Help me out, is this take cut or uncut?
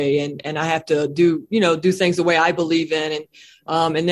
uncut